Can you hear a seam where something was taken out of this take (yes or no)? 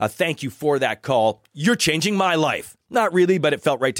no